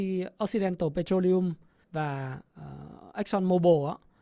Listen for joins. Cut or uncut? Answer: cut